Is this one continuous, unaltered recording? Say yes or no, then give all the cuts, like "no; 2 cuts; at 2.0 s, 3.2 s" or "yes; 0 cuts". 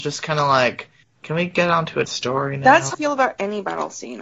no; 3 cuts; at 1.0 s, 2.0 s, 2.9 s